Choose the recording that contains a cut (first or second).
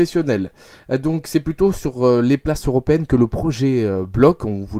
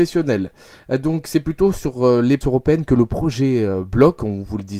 second